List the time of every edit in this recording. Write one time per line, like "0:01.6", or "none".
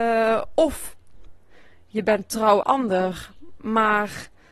0:02.6